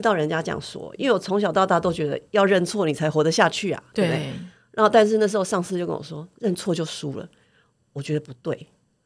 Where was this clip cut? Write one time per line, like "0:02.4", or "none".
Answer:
none